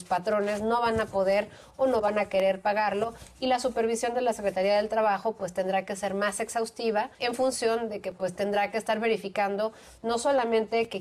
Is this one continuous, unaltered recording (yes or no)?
no